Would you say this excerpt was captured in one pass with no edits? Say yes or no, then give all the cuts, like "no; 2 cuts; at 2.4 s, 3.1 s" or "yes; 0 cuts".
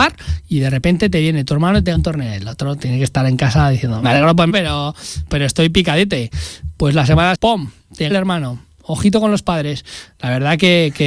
no; 6 cuts; at 1.9 s, 4.0 s, 4.5 s, 5.3 s, 7.3 s, 8.1 s